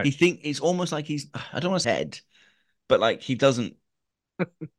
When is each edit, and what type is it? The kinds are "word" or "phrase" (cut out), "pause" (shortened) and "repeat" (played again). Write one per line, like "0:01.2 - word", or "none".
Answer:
0:01.8 - phrase